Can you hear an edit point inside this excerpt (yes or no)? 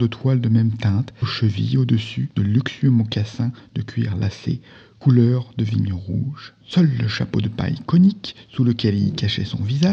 yes